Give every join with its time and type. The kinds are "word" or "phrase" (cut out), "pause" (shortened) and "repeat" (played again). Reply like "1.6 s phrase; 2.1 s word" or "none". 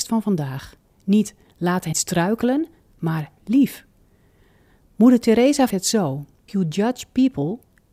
1.9 s word; 3.4 s word; 5.7 s word; 6.5 s word